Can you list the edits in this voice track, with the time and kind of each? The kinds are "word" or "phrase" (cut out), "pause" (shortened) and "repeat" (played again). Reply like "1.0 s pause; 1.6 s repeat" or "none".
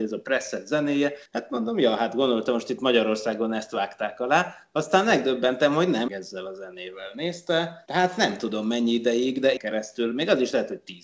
1.3 s pause; 6.1 s phrase; 9.6 s word